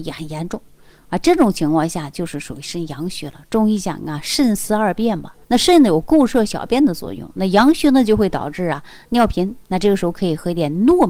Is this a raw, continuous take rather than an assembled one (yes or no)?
no